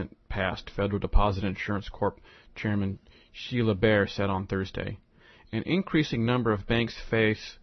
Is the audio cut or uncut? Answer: uncut